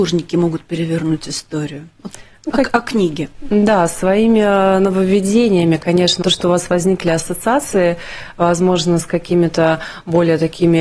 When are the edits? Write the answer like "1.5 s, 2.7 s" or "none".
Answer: 6.2 s